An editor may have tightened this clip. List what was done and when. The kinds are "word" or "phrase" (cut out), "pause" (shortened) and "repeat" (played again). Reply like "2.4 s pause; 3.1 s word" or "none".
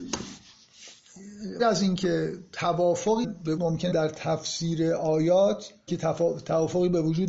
1.6 s word; 3.2 s word; 3.6 s word; 3.9 s word; 5.9 s word

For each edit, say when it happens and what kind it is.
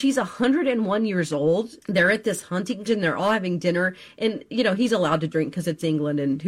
1.8 s pause; 2.9 s word

